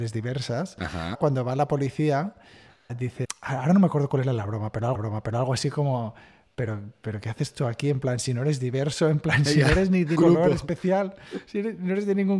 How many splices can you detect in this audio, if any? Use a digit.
1